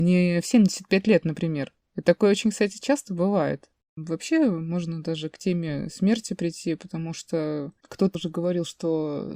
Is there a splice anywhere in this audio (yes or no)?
yes